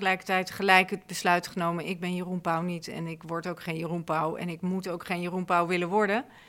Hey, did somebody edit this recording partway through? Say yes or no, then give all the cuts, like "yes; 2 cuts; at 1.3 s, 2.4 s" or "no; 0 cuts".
no; 0 cuts